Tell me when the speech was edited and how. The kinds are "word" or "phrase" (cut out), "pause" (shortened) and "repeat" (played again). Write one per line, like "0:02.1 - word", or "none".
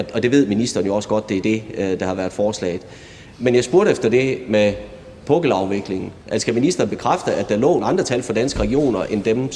0:03.3 - pause
0:06.2 - pause
0:07.8 - word